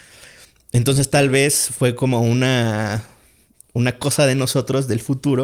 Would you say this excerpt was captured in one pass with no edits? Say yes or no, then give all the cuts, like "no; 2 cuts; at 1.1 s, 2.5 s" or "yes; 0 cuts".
yes; 0 cuts